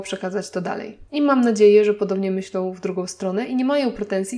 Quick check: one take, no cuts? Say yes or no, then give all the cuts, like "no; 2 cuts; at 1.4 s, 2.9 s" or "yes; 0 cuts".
no; 1 cut; at 1.1 s